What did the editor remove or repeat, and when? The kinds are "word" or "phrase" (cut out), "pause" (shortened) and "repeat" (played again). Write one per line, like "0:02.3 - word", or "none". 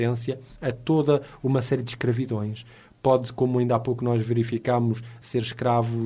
none